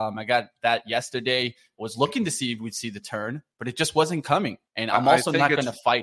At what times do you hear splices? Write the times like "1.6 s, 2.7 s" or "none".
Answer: 4.7 s